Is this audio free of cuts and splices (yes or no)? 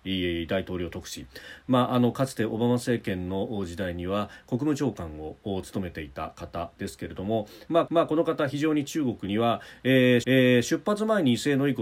no